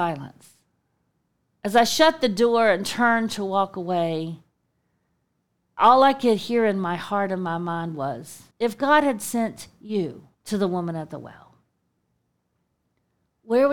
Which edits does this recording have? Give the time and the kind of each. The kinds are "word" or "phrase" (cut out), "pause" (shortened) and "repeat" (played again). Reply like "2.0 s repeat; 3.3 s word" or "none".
1.2 s pause; 8.5 s pause; 10.3 s pause